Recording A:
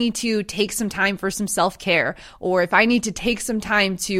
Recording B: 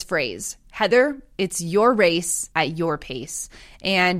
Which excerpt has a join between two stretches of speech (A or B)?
B